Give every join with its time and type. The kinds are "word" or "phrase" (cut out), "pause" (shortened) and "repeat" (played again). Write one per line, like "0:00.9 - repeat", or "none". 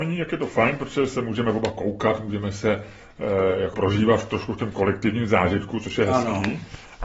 0:03.7 - word